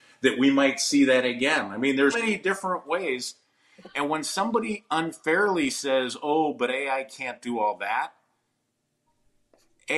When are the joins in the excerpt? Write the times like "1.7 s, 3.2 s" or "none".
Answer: 2.1 s